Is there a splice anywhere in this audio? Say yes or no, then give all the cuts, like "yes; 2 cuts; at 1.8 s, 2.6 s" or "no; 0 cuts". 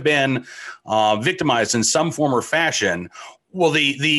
no; 0 cuts